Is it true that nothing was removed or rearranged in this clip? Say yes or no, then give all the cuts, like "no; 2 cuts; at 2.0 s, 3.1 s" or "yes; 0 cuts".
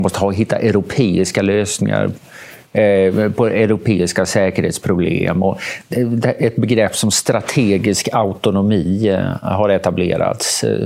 yes; 0 cuts